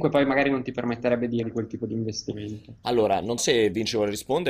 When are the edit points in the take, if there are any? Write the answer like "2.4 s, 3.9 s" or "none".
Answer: 1.4 s, 3.4 s